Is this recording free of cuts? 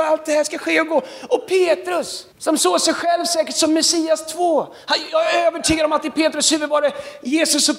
no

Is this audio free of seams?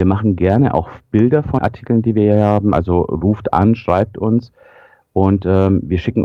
no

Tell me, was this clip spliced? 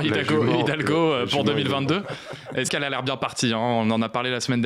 yes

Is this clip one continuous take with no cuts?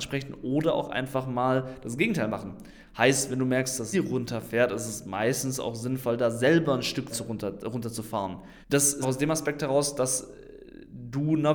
no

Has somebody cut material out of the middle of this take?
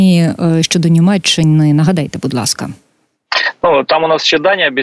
no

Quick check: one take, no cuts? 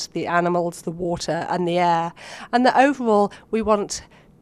yes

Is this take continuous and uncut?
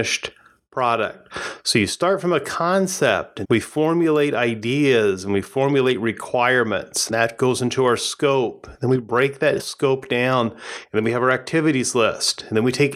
no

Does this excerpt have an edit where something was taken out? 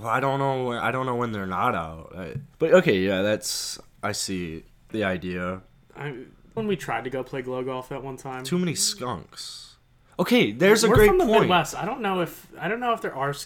yes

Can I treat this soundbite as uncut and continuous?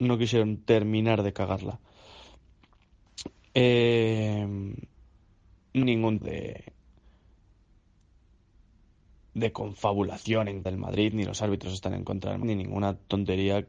no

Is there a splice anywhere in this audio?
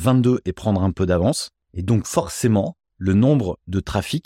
no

